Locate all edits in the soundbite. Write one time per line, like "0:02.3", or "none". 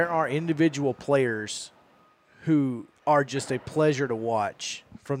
0:03.0